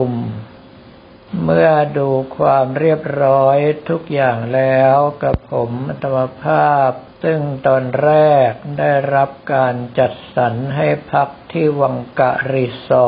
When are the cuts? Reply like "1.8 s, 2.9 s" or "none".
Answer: 7.1 s

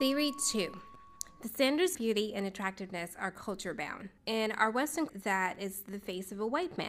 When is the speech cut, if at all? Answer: 1.9 s, 4.2 s, 5.1 s

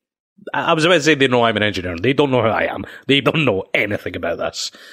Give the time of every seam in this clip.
3.2 s

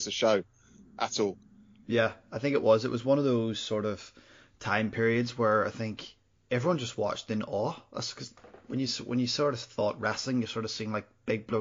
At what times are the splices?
none

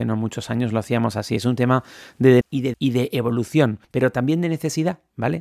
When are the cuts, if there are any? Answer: 2.4 s, 2.7 s, 3.8 s

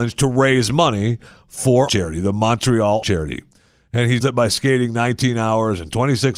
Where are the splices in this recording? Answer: 1.9 s, 3.0 s, 4.2 s

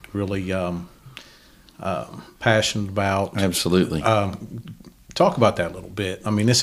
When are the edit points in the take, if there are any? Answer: none

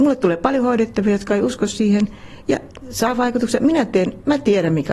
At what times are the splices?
2.8 s

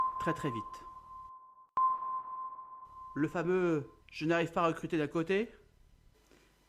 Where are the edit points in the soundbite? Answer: 4.0 s

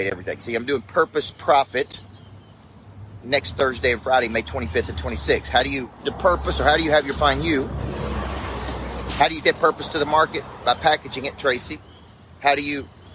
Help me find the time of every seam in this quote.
1.3 s, 3.2 s, 6.0 s, 7.2 s, 9.4 s

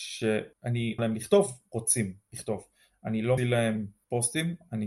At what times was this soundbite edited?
1.0 s, 3.4 s

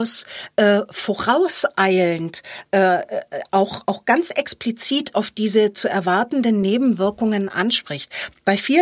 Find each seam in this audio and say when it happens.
none

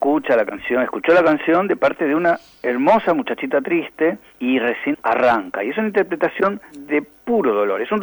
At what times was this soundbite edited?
4.9 s

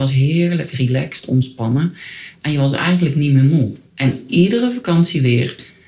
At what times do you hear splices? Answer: 3.9 s

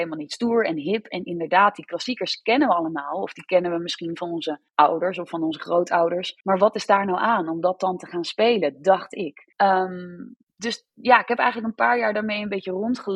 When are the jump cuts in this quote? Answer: 4.7 s, 6.4 s, 9.5 s

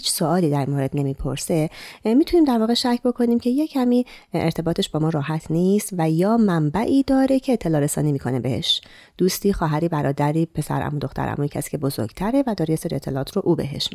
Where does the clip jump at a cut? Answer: none

